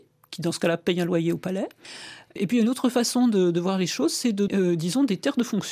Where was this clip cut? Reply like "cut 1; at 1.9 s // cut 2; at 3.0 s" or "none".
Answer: cut 1; at 4.5 s